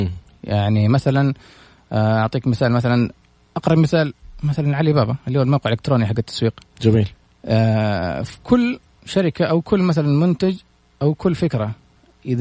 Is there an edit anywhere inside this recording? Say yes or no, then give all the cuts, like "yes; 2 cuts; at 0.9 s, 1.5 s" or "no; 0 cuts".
no; 0 cuts